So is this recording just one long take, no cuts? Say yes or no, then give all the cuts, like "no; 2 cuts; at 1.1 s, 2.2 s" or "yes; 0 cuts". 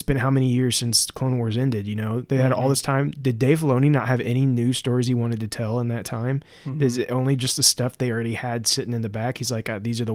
yes; 0 cuts